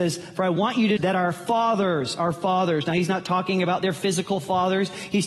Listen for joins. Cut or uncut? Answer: cut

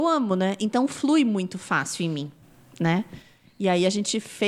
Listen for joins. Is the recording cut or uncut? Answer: uncut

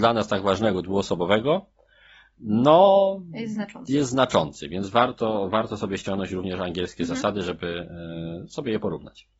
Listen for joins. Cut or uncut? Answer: uncut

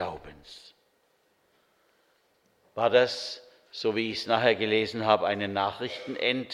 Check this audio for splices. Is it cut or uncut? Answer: uncut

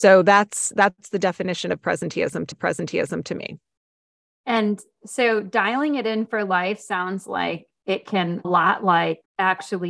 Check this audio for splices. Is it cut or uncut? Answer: cut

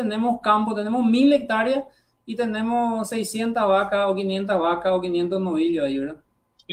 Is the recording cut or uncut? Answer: uncut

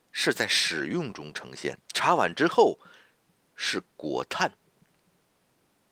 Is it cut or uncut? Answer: cut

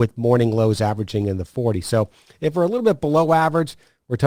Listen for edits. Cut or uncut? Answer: uncut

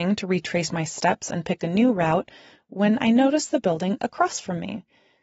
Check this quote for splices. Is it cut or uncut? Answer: uncut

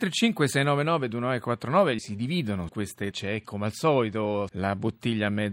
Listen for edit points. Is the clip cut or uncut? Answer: cut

